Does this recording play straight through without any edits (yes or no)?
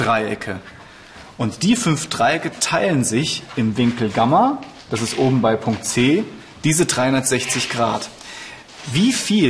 yes